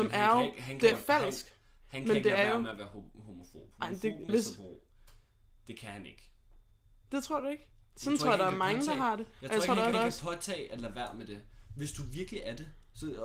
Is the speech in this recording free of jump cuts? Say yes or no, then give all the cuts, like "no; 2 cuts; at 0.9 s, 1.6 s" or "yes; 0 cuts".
no; 3 cuts; at 0.9 s, 4.3 s, 9.9 s